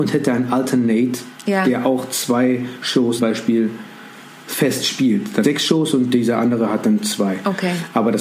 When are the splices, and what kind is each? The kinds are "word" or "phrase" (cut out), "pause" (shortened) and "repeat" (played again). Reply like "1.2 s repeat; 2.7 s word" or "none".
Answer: 3.2 s word; 5.4 s phrase